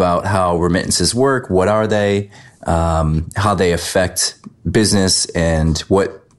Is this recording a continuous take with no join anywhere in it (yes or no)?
yes